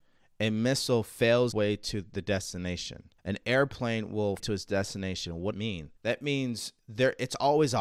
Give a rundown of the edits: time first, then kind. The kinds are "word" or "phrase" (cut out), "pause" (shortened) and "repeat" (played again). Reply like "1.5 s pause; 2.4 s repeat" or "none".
1.5 s word; 3.2 s pause; 4.4 s phrase; 5.5 s phrase; 6.0 s pause; 6.8 s pause